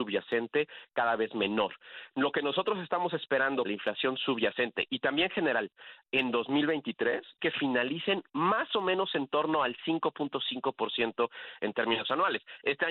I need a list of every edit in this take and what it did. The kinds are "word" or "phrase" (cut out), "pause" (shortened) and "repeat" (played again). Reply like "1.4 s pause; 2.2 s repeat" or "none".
3.6 s word; 7.4 s word